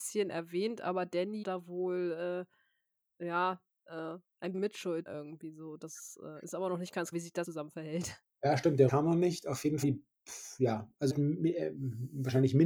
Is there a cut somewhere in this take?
yes; 8 cuts; at 1.4 s, 4.5 s, 5.1 s, 7.1 s, 7.4 s, 8.9 s, 9.8 s, 11.1 s

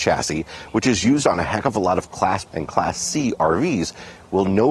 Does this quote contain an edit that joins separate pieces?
yes; 1 cut; at 2.5 s

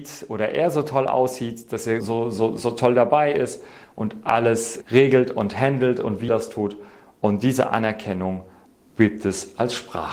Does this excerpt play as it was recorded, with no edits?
no; 3 cuts; at 2.0 s, 4.8 s, 6.3 s

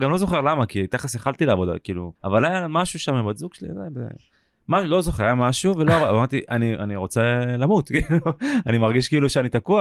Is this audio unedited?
no; 1 cut; at 2.2 s

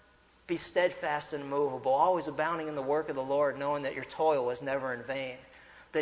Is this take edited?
no; 0 cuts

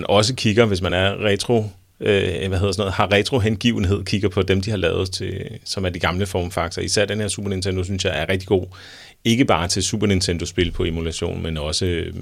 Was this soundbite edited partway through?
no; 0 cuts

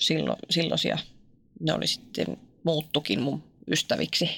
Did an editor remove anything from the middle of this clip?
no; 0 cuts

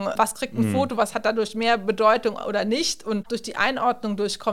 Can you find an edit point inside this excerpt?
yes; 1 cut; at 3.3 s

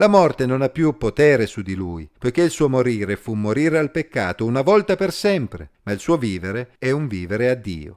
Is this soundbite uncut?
no; 3 cuts; at 2.2 s, 5.7 s, 6.8 s

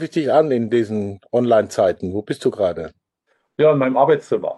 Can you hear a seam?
no; 0 cuts

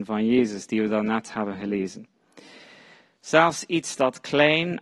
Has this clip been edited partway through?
no; 0 cuts

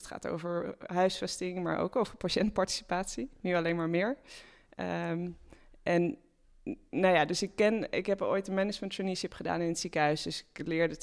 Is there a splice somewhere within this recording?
no; 0 cuts

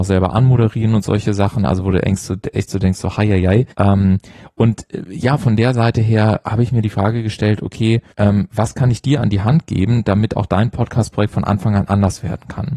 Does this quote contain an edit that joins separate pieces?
yes; 2 cuts; at 3.7 s, 8.1 s

